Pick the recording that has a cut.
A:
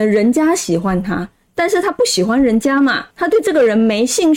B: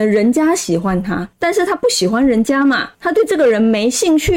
B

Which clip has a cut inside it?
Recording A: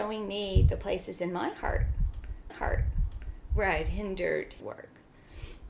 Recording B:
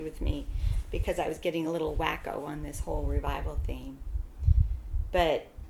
A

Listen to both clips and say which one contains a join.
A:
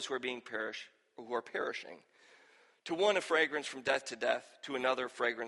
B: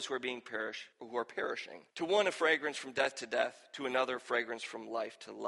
B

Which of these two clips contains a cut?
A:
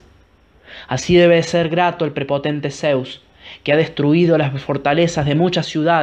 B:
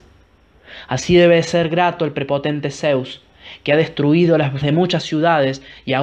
B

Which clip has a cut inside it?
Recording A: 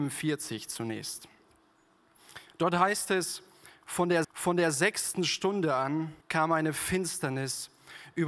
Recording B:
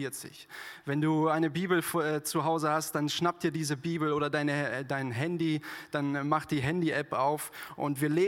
A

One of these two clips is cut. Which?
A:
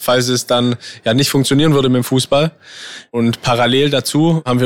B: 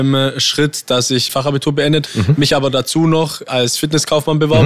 B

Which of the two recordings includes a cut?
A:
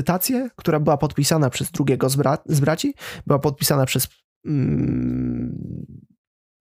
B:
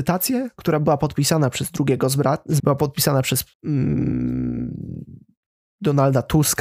B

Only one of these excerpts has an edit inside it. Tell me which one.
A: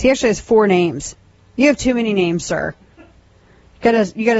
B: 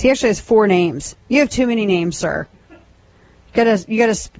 B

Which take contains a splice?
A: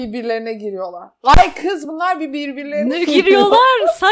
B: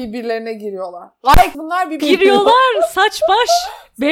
B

